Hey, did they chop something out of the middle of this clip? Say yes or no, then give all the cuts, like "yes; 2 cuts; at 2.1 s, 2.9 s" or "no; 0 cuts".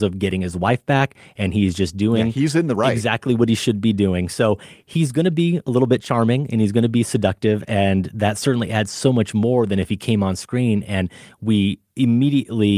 no; 0 cuts